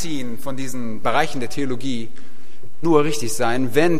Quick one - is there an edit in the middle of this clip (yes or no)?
yes